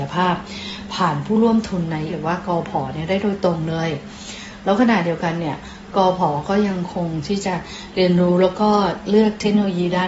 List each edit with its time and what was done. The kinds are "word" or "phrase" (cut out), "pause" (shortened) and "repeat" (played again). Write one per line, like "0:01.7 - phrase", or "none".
0:02.1 - word